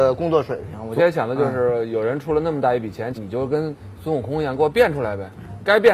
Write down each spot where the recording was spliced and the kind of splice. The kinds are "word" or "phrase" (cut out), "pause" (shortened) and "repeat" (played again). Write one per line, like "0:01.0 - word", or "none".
0:01.0 - word
0:03.1 - phrase

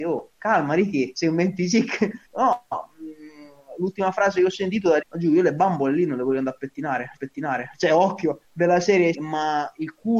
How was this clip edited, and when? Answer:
0:02.3 - pause
0:05.0 - word
0:07.2 - repeat
0:08.4 - pause
0:09.1 - word

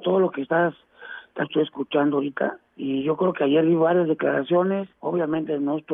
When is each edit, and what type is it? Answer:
0:01.4 - word

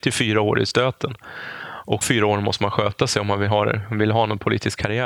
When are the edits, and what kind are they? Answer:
0:02.0 - word

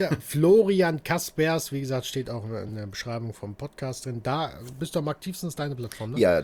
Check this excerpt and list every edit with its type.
none

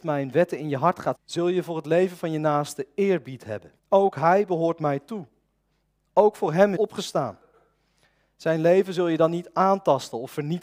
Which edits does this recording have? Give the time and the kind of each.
0:01.1 - word
0:03.8 - pause
0:06.8 - phrase

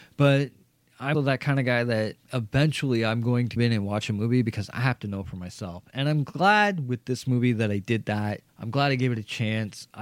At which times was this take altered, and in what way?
0:01.1 - word
0:02.2 - pause
0:03.6 - word
0:08.5 - pause

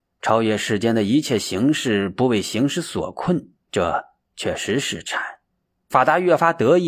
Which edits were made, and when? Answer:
0:03.6 - pause

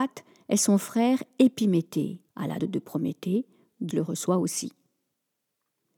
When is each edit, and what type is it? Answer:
0:02.3 - pause
0:02.6 - word
0:03.9 - word

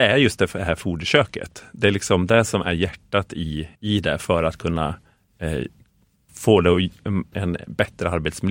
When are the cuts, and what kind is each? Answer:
0:03.8 - pause
0:06.3 - word
0:07.3 - word

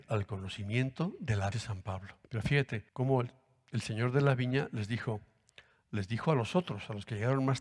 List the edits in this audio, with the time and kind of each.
0:01.5 - phrase
0:02.2 - pause
0:02.9 - pause

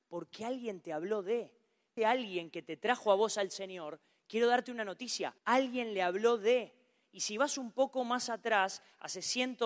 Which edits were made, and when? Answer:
0:02.0 - phrase
0:05.4 - pause

